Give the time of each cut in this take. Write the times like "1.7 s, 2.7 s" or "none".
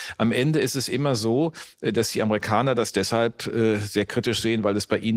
none